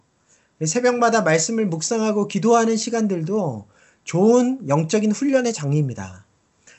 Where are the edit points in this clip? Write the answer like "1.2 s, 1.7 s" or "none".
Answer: none